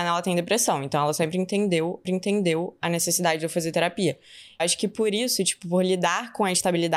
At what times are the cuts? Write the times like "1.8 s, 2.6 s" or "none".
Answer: 2.0 s, 4.6 s